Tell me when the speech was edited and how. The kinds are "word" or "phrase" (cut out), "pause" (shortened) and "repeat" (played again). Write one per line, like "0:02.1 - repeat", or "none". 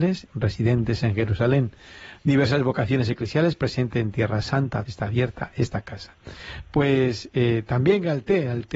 0:04.9 - phrase